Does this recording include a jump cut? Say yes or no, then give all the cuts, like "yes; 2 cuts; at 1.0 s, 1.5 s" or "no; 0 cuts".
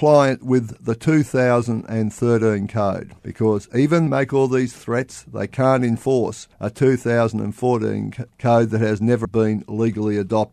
yes; 5 cuts; at 3.2 s, 4.1 s, 6.5 s, 8.3 s, 9.2 s